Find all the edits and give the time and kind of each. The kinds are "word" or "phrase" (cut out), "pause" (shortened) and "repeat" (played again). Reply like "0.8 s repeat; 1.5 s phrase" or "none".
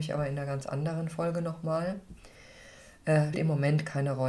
3.3 s word